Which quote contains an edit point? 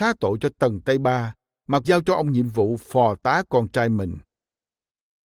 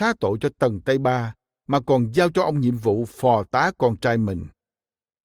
first; 1 cut; at 1.8 s

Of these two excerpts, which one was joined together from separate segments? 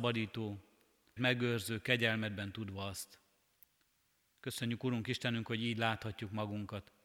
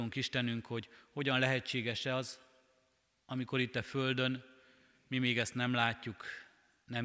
first; 1 cut; at 1.2 s

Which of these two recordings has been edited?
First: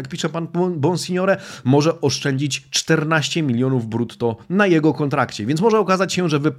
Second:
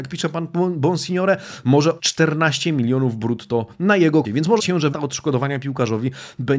second; 4 cuts; at 2.0 s, 4.2 s, 4.6 s, 4.9 s

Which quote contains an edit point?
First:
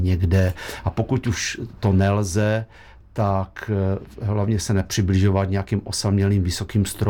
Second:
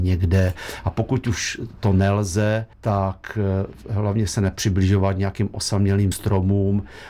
second; 2 cuts; at 2.7 s, 6.1 s

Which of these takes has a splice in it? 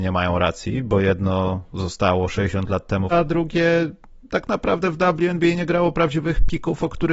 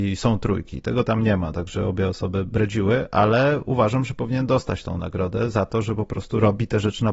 first; 1 cut; at 3.1 s

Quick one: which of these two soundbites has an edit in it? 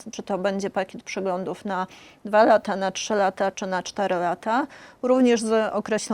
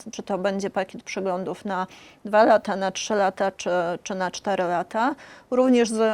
first; 1 cut; at 3.5 s

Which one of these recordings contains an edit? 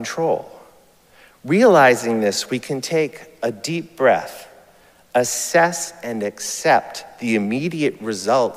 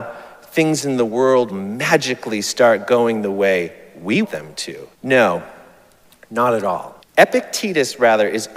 second; 4 cuts; at 1.5 s, 4.2 s, 4.9 s, 7.0 s

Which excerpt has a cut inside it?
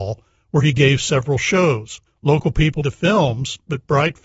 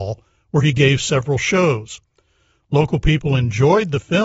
first; 2 cuts; at 2.1 s, 2.8 s

